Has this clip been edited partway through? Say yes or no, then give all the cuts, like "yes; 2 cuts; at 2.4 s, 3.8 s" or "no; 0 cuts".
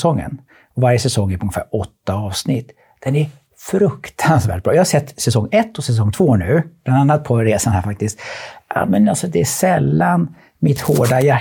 no; 0 cuts